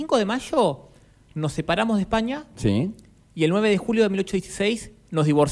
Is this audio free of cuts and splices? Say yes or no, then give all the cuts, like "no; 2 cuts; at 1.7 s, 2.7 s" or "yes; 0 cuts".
yes; 0 cuts